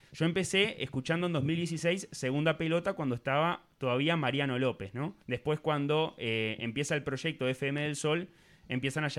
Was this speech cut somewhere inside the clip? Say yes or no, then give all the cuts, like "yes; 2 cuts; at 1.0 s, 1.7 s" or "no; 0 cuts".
yes; 1 cut; at 5.2 s